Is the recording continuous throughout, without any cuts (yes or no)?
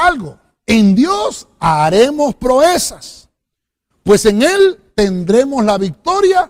yes